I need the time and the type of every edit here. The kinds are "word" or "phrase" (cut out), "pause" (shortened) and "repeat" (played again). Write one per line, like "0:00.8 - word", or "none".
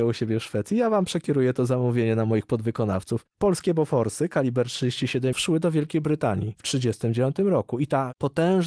0:05.3 - word